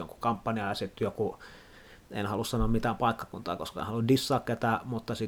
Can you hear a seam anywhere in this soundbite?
no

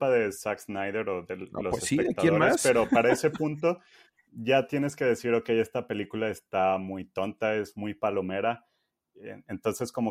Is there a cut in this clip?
no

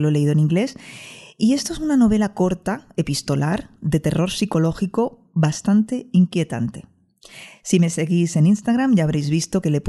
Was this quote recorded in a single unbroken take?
yes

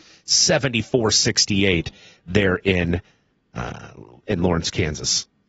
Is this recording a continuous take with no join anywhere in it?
yes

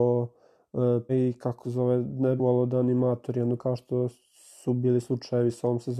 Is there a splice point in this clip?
yes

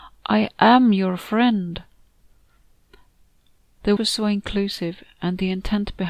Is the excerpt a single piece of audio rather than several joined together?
no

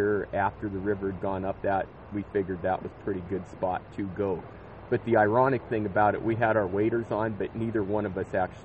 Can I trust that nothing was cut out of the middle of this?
no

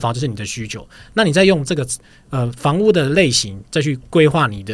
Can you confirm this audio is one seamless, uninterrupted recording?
yes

